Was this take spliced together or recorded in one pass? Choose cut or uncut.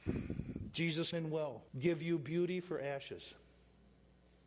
cut